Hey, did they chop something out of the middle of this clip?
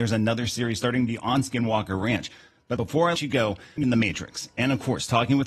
yes; 3 cuts; at 2.8 s, 3.2 s, 3.8 s

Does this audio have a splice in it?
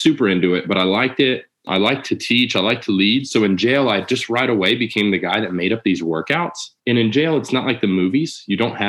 yes; 1 cut; at 6.8 s

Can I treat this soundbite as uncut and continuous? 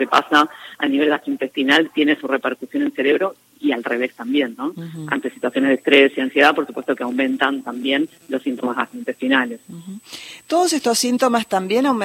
yes; 0 cuts

